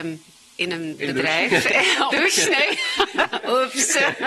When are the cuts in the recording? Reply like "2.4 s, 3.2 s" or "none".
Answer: 2.1 s